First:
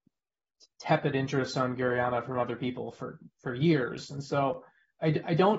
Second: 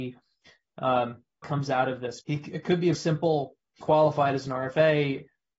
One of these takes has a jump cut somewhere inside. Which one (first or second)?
second